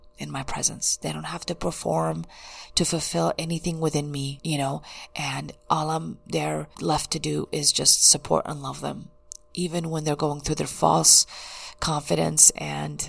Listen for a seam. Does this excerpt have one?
no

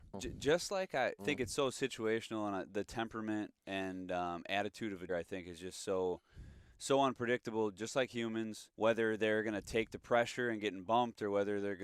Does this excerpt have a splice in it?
yes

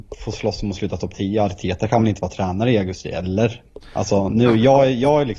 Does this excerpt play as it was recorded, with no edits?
yes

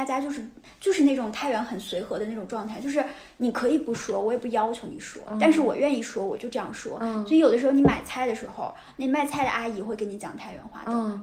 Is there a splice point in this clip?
no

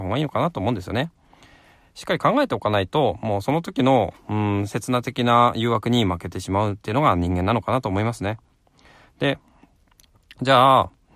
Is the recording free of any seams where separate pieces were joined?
yes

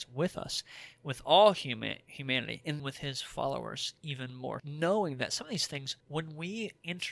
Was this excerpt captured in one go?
no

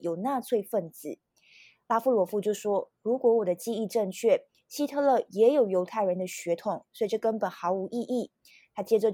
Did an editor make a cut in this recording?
no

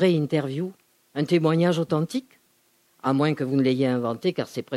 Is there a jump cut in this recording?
no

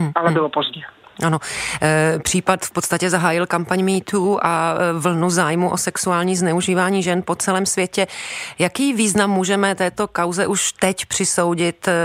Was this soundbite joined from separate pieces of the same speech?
no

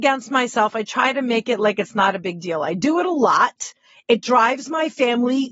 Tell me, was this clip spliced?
no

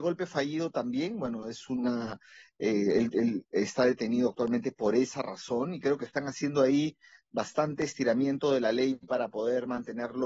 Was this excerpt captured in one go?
yes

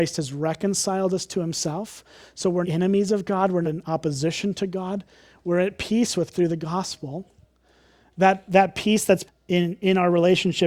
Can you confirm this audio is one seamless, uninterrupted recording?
no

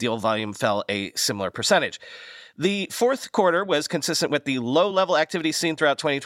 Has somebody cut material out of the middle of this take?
no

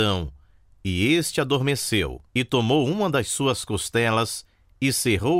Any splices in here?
yes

